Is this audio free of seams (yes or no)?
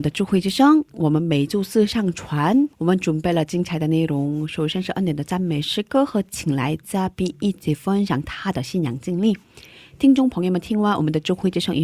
no